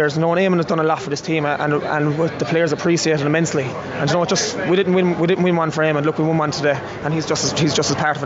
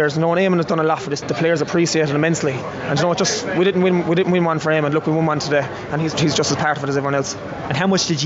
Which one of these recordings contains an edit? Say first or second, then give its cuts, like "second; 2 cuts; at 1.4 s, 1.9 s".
second; 2 cuts; at 1.2 s, 6.1 s